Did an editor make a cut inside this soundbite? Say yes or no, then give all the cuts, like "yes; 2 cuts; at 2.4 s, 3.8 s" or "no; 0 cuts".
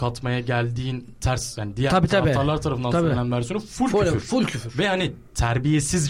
no; 0 cuts